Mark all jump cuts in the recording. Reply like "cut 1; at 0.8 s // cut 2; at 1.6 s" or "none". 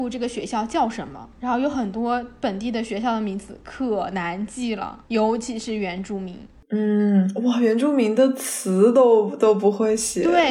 cut 1; at 1.3 s // cut 2; at 5.0 s